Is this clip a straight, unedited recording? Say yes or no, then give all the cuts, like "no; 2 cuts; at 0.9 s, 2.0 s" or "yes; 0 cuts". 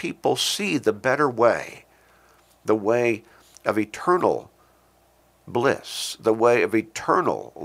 yes; 0 cuts